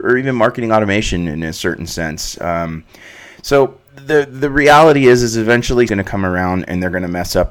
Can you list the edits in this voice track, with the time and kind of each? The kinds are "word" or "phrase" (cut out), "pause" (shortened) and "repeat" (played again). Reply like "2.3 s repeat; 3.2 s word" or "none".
3.9 s pause; 5.9 s word